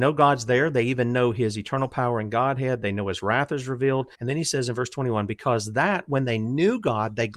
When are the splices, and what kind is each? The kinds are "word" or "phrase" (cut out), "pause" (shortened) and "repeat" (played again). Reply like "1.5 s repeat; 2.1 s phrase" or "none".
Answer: 4.1 s pause

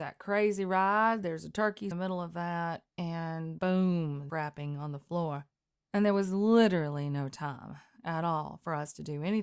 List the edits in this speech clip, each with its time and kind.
1.9 s phrase; 3.6 s word; 4.3 s phrase

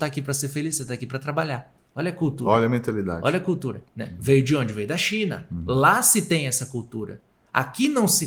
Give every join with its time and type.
1.8 s pause; 3.9 s pause

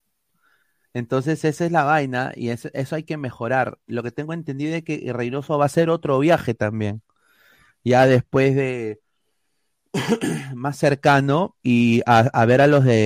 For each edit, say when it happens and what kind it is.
11.6 s pause

